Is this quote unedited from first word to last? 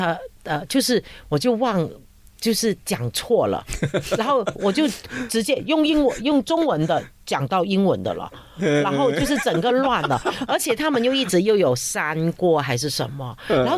yes; 0 cuts

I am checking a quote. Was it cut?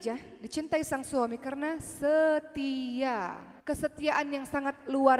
yes; 1 cut; at 3.6 s

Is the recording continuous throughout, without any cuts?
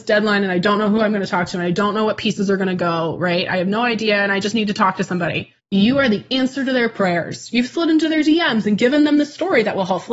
no; 1 cut; at 5.6 s

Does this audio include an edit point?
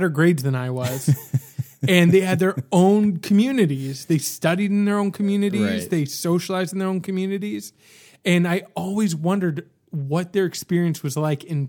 no; 0 cuts

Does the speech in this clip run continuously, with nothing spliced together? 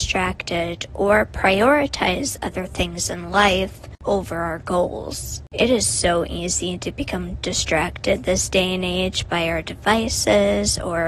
yes; 0 cuts

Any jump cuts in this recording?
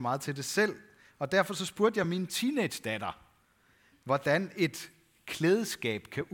no; 0 cuts

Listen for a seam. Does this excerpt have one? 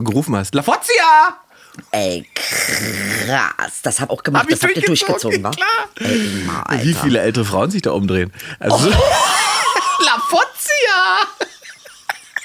yes; 1 cut; at 4.1 s

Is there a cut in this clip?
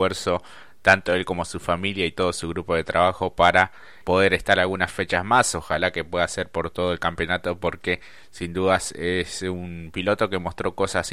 yes; 1 cut; at 4.0 s

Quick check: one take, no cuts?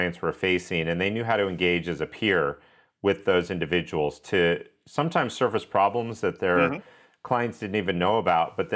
yes; 0 cuts

